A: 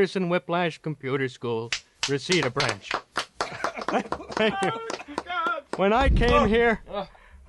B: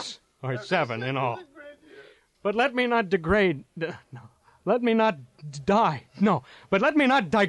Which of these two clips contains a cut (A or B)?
B